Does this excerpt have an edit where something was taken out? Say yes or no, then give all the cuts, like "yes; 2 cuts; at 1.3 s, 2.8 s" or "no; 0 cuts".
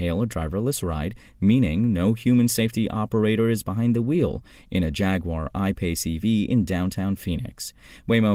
no; 0 cuts